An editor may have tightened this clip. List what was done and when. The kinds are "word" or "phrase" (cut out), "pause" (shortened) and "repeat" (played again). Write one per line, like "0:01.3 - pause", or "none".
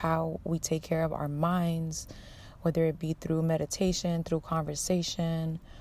none